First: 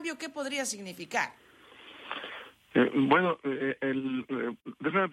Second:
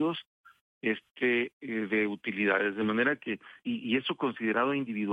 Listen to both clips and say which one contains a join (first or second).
second